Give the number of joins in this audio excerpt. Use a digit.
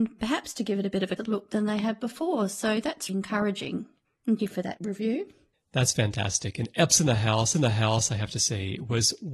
5